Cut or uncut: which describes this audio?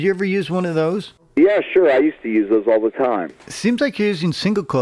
uncut